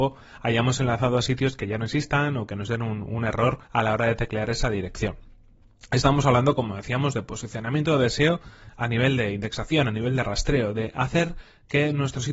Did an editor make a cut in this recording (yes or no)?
yes